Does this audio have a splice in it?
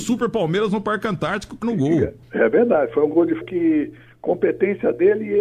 yes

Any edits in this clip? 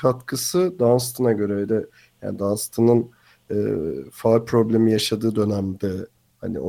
no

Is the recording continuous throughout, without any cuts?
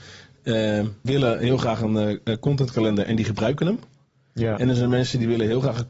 no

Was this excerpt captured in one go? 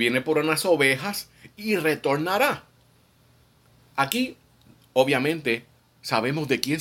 yes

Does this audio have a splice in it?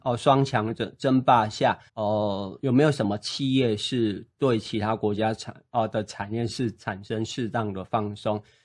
yes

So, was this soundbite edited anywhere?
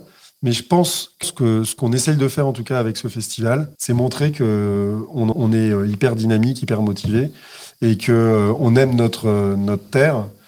yes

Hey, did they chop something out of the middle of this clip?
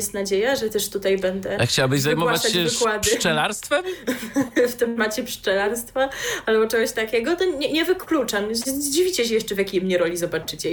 no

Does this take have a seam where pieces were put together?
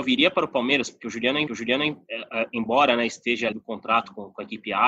yes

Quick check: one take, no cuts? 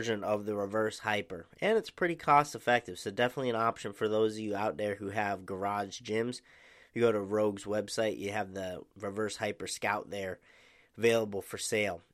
yes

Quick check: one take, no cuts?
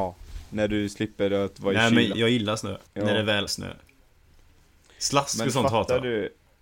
no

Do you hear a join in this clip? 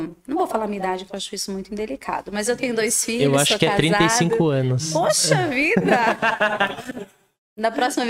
no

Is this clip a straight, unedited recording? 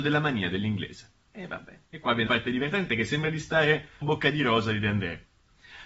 no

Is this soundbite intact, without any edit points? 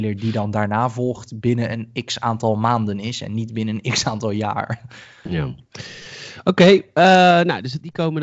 yes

